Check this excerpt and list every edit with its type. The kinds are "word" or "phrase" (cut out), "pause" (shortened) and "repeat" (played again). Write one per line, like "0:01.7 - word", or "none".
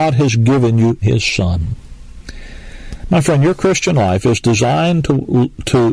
0:01.0 - word

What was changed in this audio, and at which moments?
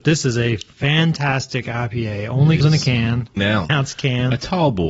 0:02.6 - word
0:03.4 - word
0:03.7 - word

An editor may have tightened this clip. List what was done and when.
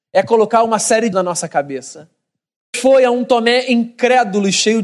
0:01.1 - word
0:02.7 - word

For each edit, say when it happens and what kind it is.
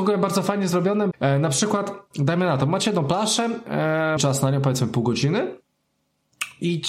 0:01.1 - word
0:04.2 - word

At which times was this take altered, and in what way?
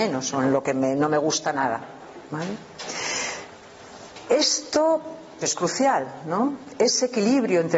0:05.4 - phrase

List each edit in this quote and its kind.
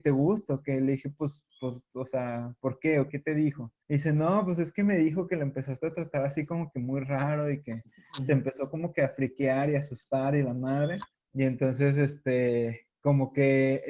0:01.5 - pause
0:03.1 - word
0:03.8 - pause
0:11.1 - pause

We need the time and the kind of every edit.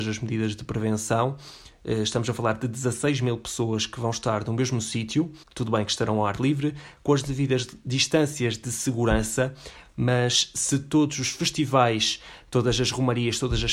0:05.4 - pause

